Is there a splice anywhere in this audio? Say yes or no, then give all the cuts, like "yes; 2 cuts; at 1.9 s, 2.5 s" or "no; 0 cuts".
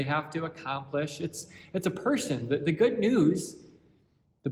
no; 0 cuts